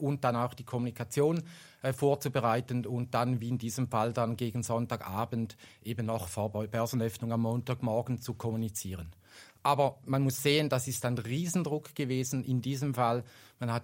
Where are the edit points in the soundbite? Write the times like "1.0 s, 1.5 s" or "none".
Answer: none

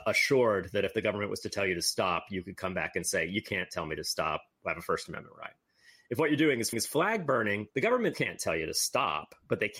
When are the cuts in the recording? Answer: 6.7 s, 7.7 s, 8.1 s

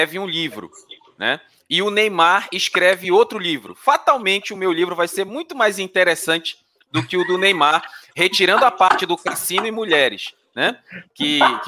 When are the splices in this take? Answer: none

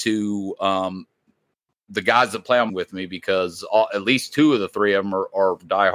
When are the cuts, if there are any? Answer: 2.7 s

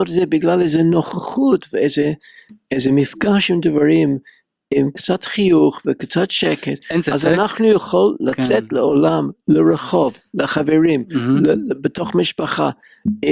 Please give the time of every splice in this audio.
11.7 s

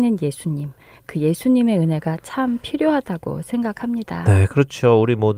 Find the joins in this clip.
none

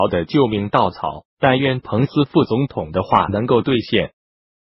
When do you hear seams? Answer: 1.3 s

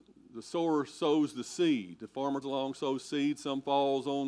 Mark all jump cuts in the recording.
2.4 s

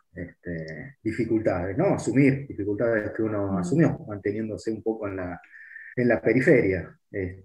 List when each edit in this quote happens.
5.9 s

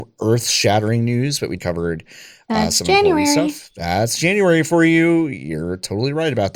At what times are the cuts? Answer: 1.6 s

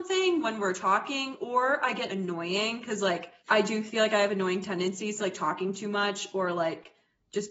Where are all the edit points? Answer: 2.1 s, 3.4 s, 5.2 s

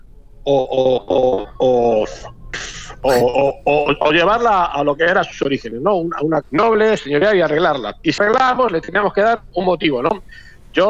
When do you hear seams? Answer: 6.4 s, 8.2 s, 9.5 s

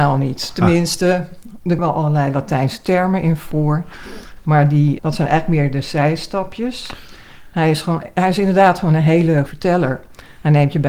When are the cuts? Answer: 1.8 s, 5.0 s, 9.5 s

